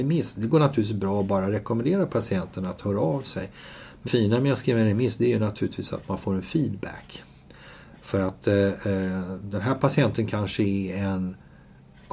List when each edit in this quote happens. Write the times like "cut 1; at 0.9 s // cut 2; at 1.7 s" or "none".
cut 1; at 4.1 s